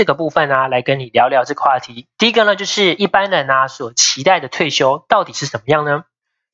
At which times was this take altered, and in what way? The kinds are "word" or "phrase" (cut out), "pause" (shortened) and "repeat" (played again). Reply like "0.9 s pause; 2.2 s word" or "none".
2.1 s pause